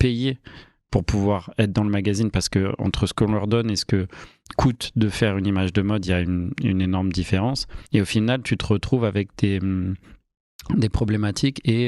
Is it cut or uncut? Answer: cut